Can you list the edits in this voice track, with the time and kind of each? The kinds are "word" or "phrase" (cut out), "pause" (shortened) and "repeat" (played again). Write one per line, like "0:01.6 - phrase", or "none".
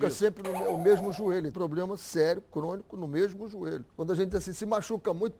0:01.5 - phrase
0:03.9 - pause